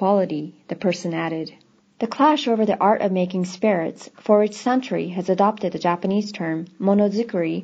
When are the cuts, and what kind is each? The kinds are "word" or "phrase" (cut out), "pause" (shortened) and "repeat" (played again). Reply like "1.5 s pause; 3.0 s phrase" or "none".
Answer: none